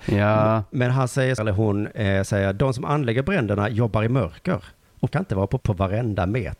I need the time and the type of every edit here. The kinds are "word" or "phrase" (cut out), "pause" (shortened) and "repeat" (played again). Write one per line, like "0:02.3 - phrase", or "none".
0:01.4 - word
0:05.1 - word
0:05.6 - word

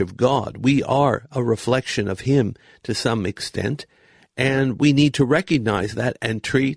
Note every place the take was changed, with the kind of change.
none

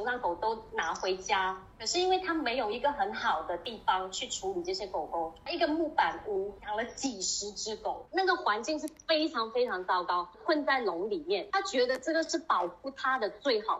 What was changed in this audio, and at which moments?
0:01.7 - pause

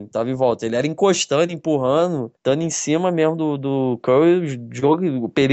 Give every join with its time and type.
none

